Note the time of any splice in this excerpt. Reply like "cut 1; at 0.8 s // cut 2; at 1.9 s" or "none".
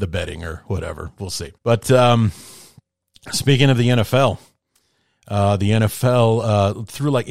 cut 1; at 1.6 s